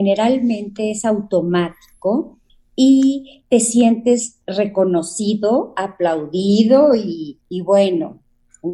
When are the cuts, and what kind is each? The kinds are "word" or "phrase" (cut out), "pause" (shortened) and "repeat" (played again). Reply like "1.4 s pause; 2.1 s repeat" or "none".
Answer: 2.5 s pause; 7.4 s pause

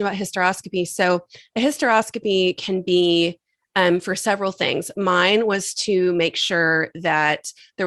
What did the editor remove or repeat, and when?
none

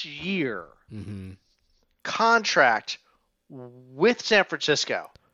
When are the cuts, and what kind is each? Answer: none

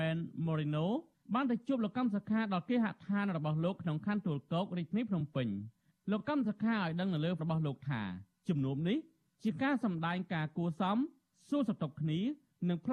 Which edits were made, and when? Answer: 1.1 s pause; 7.4 s word

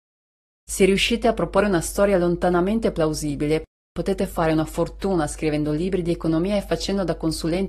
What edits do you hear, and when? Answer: none

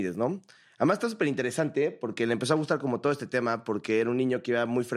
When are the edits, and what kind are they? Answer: none

